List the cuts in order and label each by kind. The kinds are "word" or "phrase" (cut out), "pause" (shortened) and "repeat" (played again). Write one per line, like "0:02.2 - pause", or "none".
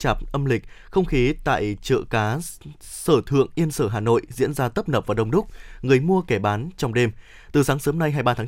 none